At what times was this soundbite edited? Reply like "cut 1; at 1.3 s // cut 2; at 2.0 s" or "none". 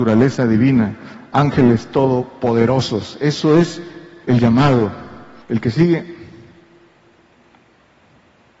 cut 1; at 4.2 s // cut 2; at 5.4 s